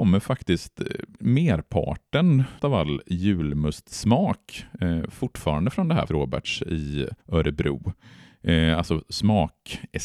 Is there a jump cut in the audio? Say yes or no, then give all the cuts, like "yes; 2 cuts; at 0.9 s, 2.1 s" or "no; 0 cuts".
yes; 2 cuts; at 6.1 s, 7.2 s